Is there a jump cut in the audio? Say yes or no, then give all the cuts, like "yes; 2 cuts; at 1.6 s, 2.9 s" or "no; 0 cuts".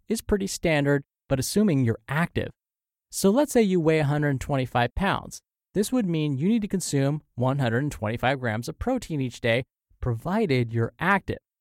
no; 0 cuts